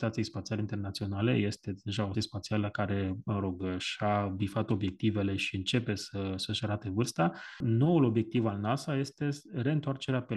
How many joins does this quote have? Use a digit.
1